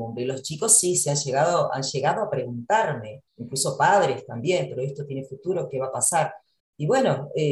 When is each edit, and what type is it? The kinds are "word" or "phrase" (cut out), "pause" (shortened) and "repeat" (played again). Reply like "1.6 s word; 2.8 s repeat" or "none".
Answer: 3.3 s pause; 6.6 s pause